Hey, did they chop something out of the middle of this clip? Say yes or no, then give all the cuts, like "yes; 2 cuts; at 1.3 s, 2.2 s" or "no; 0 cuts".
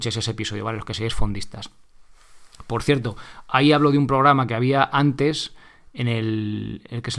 no; 0 cuts